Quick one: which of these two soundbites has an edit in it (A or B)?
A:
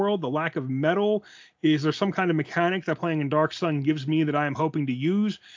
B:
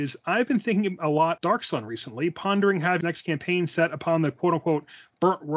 B